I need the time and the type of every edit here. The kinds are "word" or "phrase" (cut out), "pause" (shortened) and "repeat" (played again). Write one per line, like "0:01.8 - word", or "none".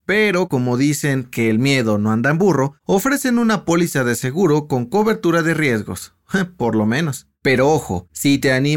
none